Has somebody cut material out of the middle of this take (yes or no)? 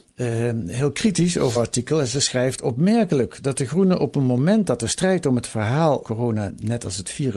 yes